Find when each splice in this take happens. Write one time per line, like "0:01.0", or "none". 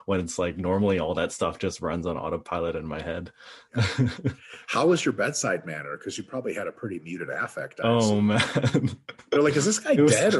none

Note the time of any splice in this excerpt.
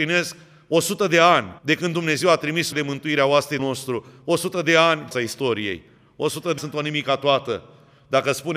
0:01.6
0:02.7
0:03.6
0:05.1
0:06.6

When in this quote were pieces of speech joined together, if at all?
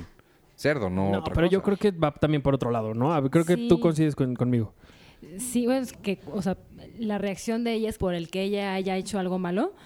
0:05.9
0:08.0

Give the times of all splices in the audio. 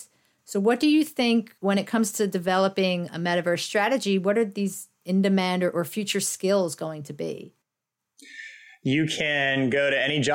0:01.6

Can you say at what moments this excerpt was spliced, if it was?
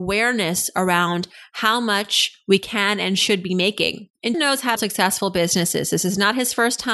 0:04.3
0:04.8

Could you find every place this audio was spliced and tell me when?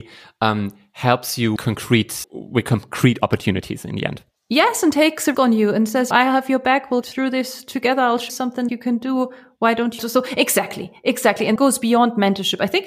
0:01.6
0:02.2
0:05.3
0:06.1
0:07.0
0:08.3
0:08.7
0:10.0
0:11.6

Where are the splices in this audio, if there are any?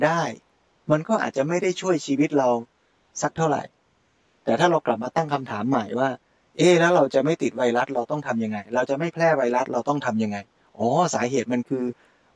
none

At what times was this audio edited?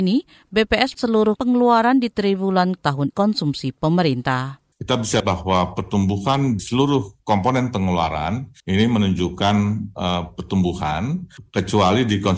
0:00.9
0:01.4
0:02.8
0:03.1
0:04.7
0:05.2
0:06.6
0:07.2
0:08.6

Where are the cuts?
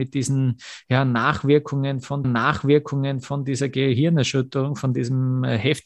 0:02.2

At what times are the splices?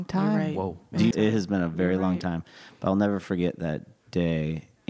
0:01.1

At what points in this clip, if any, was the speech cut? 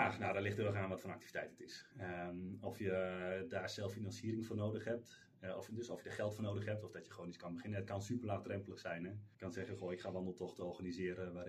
0:01.9
0:09.3

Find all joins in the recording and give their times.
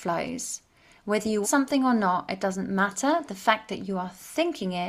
0:01.4

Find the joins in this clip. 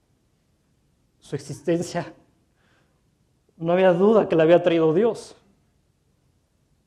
none

